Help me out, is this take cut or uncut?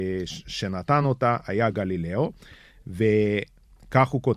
uncut